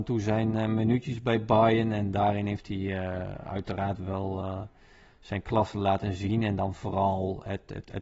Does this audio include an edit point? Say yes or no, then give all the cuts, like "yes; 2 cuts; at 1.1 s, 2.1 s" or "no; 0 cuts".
no; 0 cuts